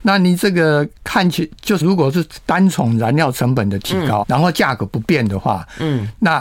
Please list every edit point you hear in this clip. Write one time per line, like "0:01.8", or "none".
0:01.8
0:04.2